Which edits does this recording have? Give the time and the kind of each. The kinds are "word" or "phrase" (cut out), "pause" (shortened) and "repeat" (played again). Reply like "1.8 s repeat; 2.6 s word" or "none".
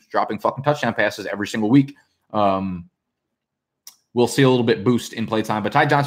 none